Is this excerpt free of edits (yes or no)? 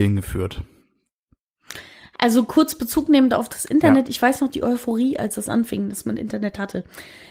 yes